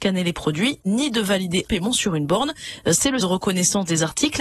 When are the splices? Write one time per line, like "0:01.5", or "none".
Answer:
0:01.7
0:03.2